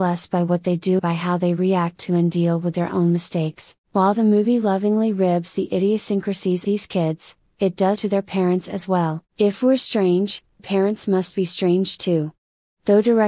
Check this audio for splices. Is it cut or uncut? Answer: cut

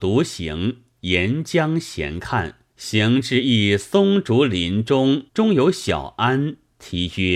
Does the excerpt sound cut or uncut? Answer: cut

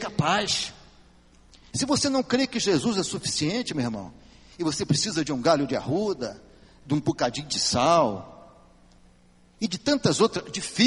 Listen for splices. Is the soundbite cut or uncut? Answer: uncut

